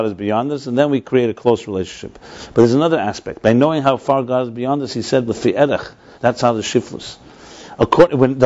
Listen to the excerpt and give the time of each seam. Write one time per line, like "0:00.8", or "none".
0:05.3
0:06.2